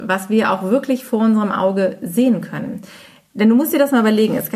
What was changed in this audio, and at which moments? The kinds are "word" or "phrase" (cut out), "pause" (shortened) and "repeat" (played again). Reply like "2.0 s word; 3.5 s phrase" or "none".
none